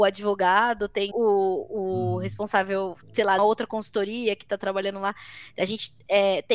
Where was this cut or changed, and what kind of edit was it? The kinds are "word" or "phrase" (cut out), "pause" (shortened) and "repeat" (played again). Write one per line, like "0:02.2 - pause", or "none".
0:01.1 - word
0:03.0 - pause
0:03.4 - phrase